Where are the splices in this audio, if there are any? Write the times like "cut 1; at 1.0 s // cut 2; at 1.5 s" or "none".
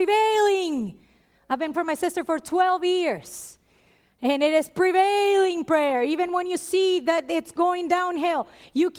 cut 1; at 1.7 s